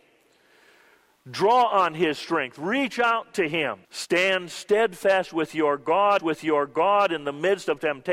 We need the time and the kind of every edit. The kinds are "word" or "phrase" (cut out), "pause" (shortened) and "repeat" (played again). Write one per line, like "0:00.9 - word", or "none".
0:03.8 - pause
0:06.2 - repeat